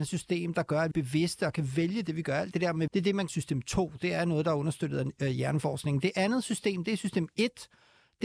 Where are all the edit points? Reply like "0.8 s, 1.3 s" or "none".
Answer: 0.9 s, 2.9 s, 3.3 s